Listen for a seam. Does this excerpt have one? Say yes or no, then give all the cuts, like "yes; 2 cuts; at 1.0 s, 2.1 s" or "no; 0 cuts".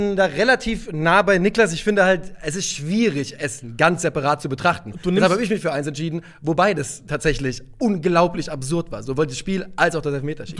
no; 0 cuts